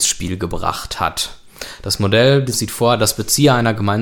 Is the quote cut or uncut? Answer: cut